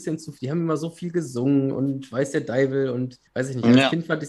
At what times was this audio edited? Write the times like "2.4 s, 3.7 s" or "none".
3.3 s